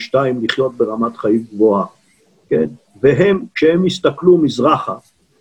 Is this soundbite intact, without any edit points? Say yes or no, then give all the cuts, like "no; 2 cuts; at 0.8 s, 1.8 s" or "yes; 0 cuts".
yes; 0 cuts